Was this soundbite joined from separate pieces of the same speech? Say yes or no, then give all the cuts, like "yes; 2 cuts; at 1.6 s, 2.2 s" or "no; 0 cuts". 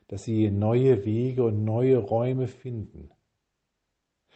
no; 0 cuts